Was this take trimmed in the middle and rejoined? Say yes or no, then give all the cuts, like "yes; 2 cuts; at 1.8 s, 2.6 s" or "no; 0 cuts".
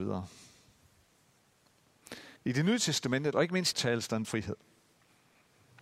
yes; 4 cuts; at 2.4 s, 3.3 s, 3.7 s, 4.2 s